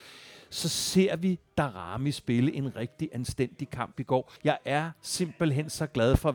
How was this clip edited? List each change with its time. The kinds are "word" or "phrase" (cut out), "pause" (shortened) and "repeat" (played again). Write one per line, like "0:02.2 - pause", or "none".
0:04.4 - pause